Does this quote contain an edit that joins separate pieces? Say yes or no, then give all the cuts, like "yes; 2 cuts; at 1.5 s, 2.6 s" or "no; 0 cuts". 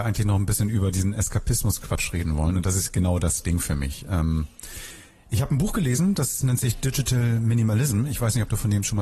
no; 0 cuts